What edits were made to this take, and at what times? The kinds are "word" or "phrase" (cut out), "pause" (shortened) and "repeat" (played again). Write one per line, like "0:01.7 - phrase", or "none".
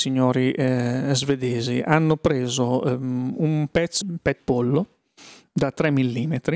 0:04.0 - word
0:04.4 - word